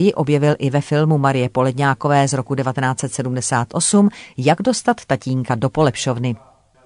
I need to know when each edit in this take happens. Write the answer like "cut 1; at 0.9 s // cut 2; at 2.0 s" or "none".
none